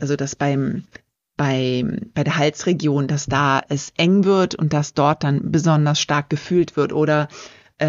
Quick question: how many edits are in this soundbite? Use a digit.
0